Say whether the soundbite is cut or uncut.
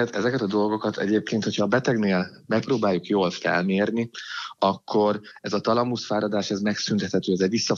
uncut